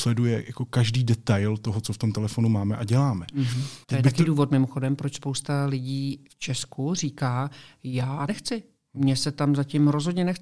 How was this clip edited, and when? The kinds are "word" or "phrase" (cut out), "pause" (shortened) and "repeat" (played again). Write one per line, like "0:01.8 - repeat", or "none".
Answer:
0:03.8 - pause
0:08.3 - word